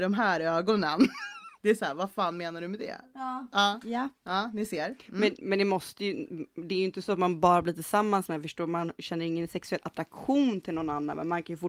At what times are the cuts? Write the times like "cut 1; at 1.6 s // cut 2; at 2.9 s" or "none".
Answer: cut 1; at 1.6 s